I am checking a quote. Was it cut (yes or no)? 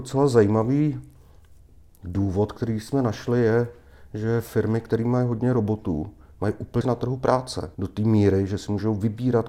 yes